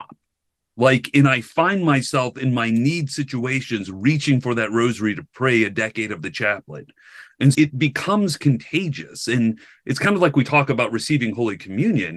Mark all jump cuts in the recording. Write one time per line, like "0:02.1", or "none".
0:07.5